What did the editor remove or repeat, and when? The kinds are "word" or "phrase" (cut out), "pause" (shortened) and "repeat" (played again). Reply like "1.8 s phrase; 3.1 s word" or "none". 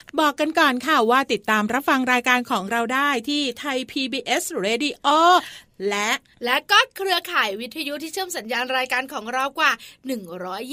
none